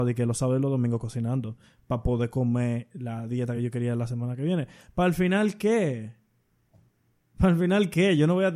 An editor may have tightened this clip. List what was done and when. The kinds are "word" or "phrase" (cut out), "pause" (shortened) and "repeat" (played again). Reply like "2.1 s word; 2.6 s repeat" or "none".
none